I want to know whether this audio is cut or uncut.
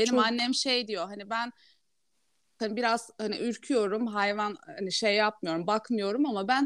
uncut